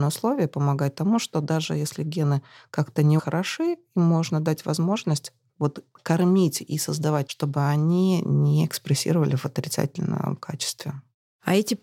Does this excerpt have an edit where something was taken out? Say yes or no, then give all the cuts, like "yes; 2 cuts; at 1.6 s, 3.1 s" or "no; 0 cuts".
yes; 2 cuts; at 3.2 s, 7.3 s